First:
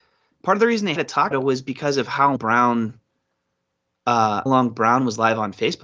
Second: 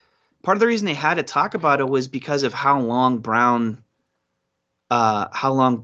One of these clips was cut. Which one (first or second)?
first